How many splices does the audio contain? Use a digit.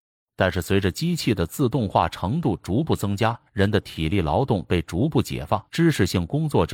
2